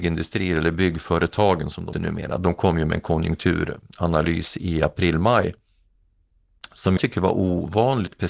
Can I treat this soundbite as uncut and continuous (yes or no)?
no